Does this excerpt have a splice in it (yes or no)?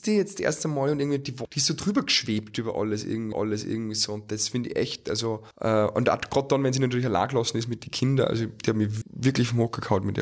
yes